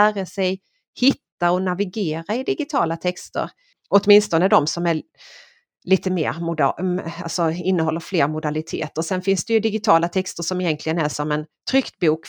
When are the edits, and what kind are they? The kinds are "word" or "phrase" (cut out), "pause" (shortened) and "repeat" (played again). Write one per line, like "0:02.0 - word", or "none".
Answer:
none